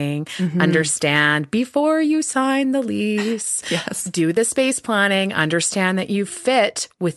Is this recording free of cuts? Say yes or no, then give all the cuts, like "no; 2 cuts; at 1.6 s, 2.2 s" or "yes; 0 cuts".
yes; 0 cuts